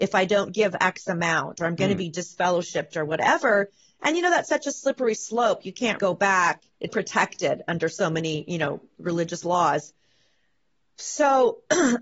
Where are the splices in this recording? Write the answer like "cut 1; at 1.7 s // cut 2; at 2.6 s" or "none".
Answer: cut 1; at 6.0 s // cut 2; at 6.9 s